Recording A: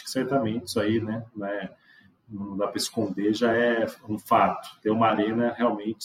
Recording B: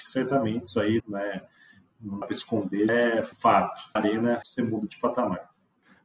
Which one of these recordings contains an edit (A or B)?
B